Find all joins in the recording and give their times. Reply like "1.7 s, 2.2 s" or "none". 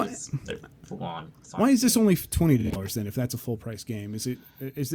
none